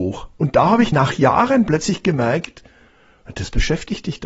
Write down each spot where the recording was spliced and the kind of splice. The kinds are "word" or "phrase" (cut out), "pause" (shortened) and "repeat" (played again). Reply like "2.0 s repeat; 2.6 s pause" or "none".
0.9 s word